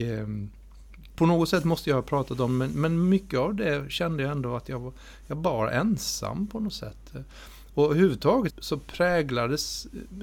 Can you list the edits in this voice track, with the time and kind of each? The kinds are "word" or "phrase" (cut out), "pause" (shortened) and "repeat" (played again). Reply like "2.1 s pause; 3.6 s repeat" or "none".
8.5 s word